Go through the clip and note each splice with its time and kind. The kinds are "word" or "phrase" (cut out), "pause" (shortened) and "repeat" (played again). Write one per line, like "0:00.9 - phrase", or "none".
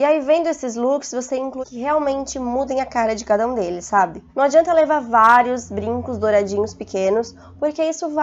0:01.6 - word
0:04.3 - pause